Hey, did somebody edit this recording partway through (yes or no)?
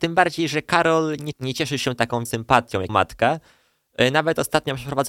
yes